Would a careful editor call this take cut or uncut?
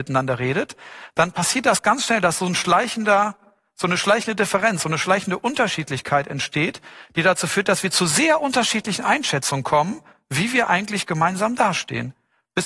uncut